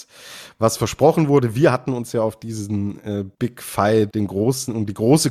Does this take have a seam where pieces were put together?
yes; 2 cuts; at 3.3 s, 4.1 s

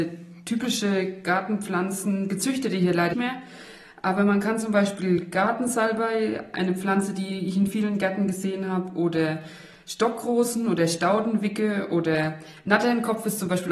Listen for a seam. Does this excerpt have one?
yes; 1 cut; at 3.1 s

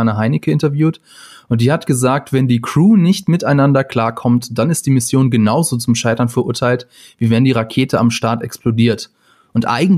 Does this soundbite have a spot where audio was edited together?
no; 0 cuts

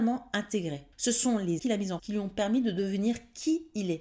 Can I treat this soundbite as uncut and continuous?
no; 3 cuts; at 0.9 s, 1.6 s, 2.0 s

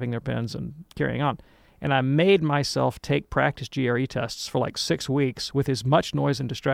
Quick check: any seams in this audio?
yes; 1 cut; at 0.9 s

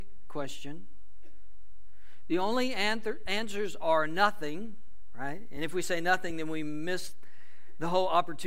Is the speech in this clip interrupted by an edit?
no; 0 cuts

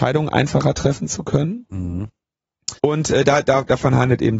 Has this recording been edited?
yes; 1 cut; at 2.8 s

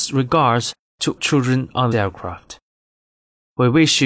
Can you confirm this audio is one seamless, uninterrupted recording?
no; 2 cuts; at 1.2 s, 1.9 s

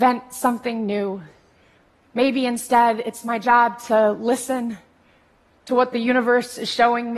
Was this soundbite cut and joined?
no; 0 cuts

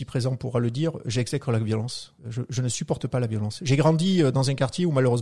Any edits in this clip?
yes; 1 cut; at 2.2 s

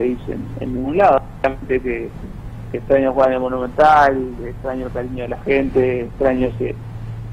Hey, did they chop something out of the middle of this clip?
no; 0 cuts

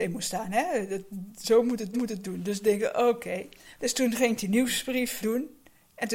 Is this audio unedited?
no; 2 cuts; at 1.9 s, 5.2 s

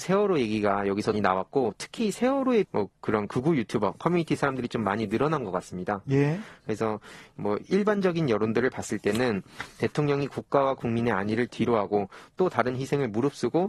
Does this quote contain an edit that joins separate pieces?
yes; 2 cuts; at 1.1 s, 2.6 s

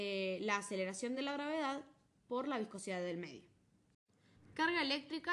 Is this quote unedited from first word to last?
yes; 0 cuts

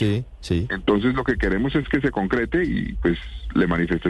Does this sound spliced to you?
no; 0 cuts

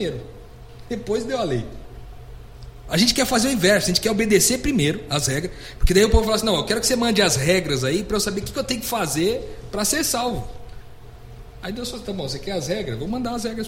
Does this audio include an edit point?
no; 0 cuts

